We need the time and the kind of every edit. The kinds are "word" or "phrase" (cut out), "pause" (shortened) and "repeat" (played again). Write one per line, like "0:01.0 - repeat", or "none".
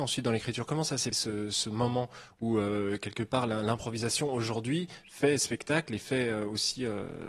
0:01.1 - word